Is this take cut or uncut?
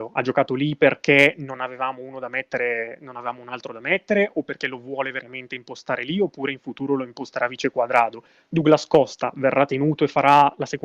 uncut